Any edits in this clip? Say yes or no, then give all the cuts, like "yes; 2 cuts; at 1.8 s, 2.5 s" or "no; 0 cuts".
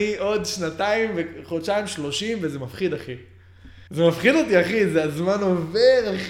yes; 1 cut; at 3.9 s